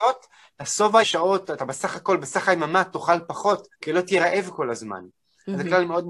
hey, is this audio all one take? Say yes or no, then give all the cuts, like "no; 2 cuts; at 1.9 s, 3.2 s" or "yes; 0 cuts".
no; 2 cuts; at 1.0 s, 3.7 s